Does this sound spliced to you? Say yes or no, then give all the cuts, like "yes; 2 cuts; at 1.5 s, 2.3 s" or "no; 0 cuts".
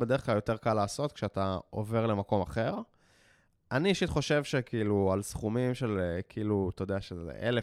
no; 0 cuts